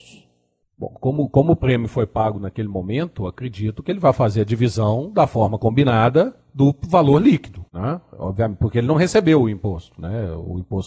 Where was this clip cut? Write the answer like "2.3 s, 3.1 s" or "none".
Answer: 6.4 s, 7.7 s